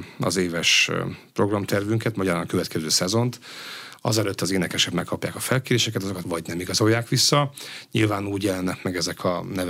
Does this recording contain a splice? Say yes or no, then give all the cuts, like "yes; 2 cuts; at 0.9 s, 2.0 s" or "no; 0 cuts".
yes; 1 cut; at 6.2 s